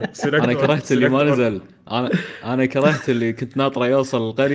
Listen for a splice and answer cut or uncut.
uncut